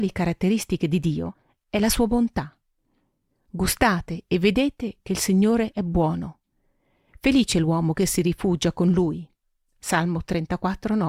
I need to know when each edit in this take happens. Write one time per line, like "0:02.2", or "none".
none